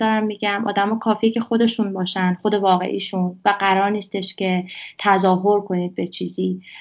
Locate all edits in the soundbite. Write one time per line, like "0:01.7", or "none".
none